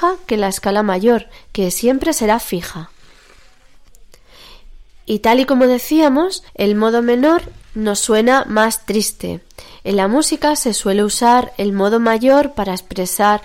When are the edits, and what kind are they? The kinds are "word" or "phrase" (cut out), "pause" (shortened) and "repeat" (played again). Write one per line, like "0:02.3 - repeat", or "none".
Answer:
0:06.5 - pause

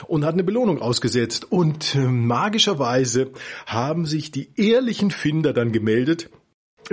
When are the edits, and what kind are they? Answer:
none

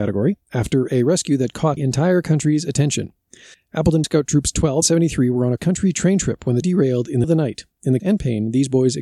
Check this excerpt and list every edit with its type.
0:01.8 - word
0:04.0 - word
0:04.8 - word
0:05.6 - word
0:06.6 - word
0:07.2 - word
0:08.0 - word

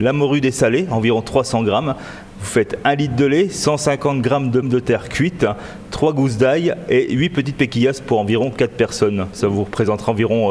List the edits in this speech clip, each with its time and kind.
0:04.6 - word

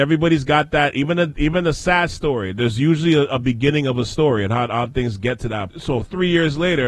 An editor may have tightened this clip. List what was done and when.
0:05.7 - word

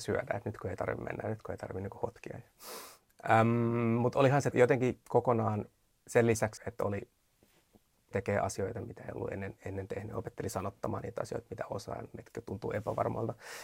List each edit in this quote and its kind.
0:04.5 - word
0:06.0 - word
0:06.6 - word
0:08.1 - word

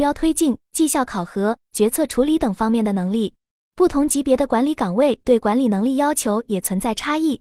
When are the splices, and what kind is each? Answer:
none

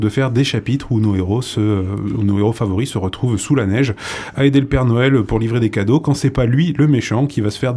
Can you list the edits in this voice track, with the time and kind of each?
none

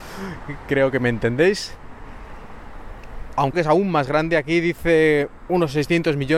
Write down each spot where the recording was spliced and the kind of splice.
0:03.5 - phrase

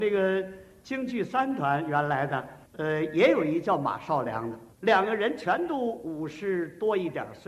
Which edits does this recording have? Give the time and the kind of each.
0:02.7 - pause
0:04.7 - pause

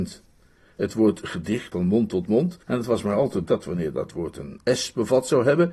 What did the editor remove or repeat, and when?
0:01.7 - word
0:02.6 - pause
0:03.5 - word

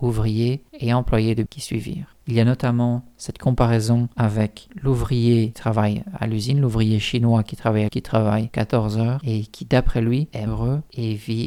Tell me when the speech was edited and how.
0:01.5 - word
0:07.9 - word
0:08.5 - phrase
0:10.5 - word

